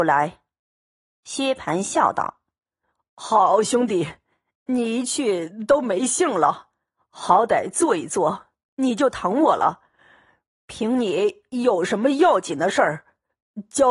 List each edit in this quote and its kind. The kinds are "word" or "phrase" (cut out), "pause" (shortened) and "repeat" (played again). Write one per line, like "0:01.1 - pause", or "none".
none